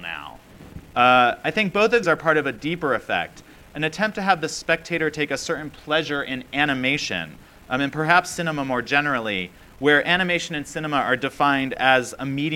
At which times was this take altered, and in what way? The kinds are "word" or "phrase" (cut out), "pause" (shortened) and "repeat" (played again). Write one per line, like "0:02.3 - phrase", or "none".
0:02.0 - word